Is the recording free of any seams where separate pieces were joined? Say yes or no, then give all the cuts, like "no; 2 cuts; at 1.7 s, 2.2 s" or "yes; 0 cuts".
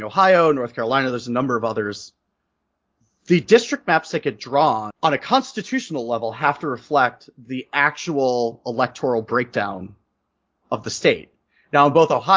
no; 1 cut; at 4.9 s